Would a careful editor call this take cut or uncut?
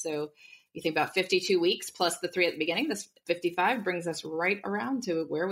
cut